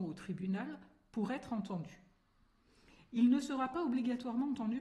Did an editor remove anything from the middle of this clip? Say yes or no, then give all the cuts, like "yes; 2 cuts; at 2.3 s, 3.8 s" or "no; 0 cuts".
no; 0 cuts